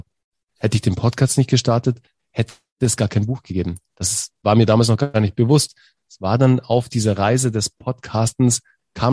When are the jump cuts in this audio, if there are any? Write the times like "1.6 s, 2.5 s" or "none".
none